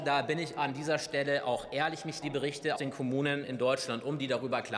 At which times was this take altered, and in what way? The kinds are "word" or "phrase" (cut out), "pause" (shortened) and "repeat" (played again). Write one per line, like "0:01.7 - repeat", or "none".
0:02.2 - word
0:02.8 - word